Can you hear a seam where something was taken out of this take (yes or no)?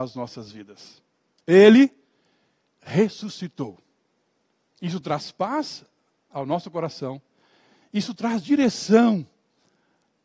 no